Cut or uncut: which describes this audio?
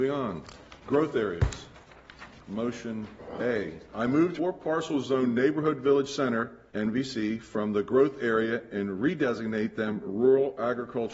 cut